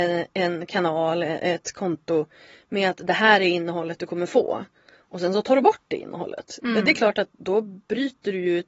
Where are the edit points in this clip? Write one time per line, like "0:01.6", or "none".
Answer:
none